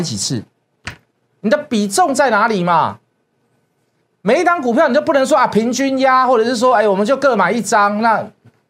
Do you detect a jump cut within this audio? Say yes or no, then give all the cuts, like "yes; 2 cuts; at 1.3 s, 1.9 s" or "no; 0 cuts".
no; 0 cuts